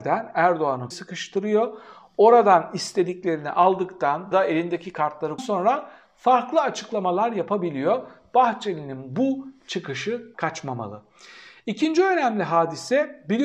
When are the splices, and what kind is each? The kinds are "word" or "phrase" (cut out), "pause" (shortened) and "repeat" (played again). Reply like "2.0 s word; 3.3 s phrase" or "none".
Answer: 0.9 s word; 4.3 s word; 5.4 s word; 10.3 s word